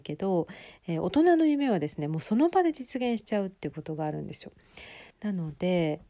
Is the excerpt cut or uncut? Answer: cut